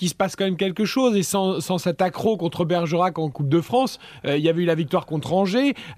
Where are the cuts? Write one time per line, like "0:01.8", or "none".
none